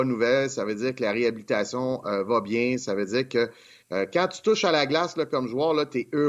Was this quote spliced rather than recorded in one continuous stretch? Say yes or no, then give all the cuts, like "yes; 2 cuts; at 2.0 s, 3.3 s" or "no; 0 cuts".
no; 0 cuts